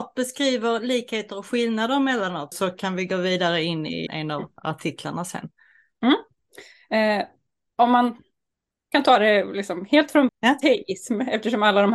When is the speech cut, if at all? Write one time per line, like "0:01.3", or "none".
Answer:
0:02.5
0:04.1
0:10.3